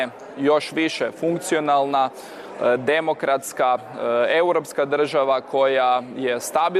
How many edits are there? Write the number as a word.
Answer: zero